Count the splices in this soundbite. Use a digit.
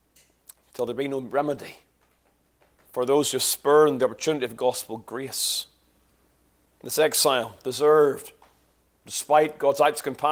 0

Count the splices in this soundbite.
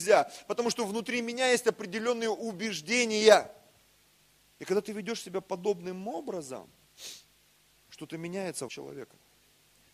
1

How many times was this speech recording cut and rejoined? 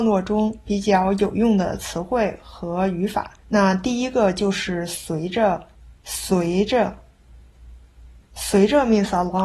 2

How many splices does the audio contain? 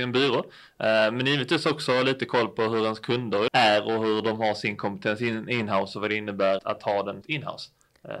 3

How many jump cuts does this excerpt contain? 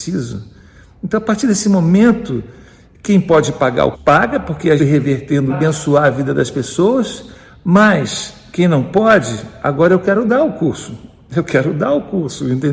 3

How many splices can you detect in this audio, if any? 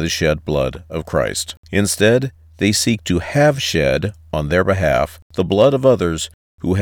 2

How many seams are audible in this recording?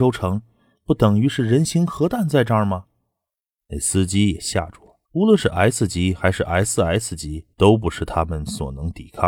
2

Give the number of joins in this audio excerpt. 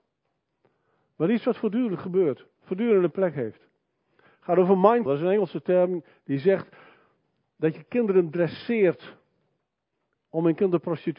2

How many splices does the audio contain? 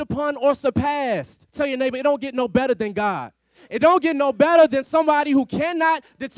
1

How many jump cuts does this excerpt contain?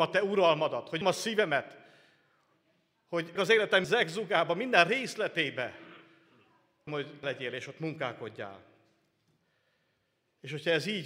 5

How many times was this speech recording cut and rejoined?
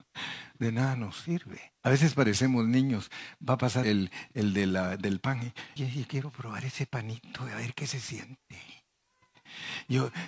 3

